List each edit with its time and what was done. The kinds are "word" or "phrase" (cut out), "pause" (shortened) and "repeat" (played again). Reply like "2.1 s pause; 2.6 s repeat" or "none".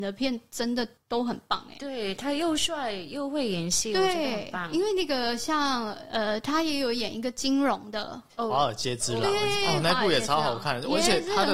8.3 s pause